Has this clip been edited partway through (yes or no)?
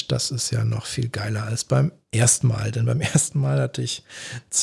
no